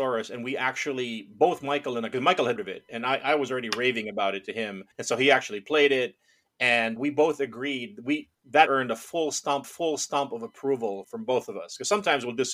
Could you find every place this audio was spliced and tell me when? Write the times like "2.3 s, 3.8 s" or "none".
2.6 s, 4.9 s, 7.0 s, 8.7 s, 9.6 s, 11.0 s